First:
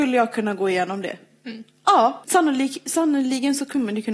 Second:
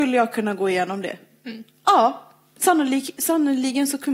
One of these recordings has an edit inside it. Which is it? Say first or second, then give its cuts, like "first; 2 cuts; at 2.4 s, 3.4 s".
first; 1 cut; at 2.2 s